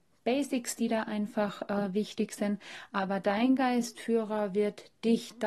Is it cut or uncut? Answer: uncut